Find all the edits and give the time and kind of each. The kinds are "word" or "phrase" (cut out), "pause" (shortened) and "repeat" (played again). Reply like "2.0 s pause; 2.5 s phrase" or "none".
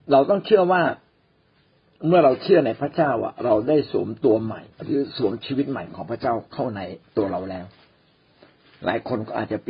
4.7 s pause